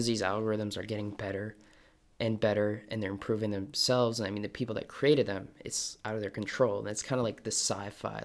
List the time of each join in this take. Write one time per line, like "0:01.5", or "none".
none